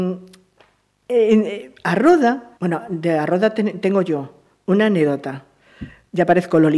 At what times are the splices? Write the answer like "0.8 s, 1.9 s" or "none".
2.6 s